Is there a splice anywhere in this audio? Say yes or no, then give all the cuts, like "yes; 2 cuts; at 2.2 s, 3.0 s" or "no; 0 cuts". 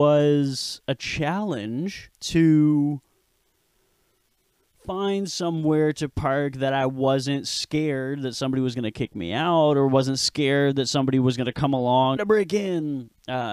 yes; 2 cuts; at 2.1 s, 12.2 s